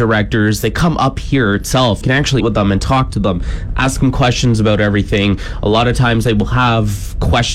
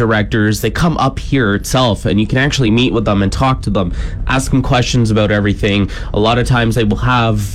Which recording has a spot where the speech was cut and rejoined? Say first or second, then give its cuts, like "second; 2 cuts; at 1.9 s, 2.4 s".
first; 2 cuts; at 2.0 s, 2.4 s